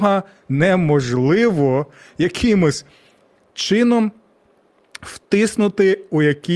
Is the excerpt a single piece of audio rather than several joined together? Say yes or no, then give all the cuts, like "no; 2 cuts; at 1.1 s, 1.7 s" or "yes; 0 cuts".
yes; 0 cuts